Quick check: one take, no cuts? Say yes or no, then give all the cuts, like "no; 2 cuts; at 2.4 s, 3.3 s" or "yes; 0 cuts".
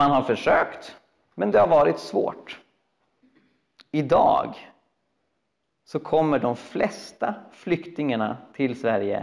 yes; 0 cuts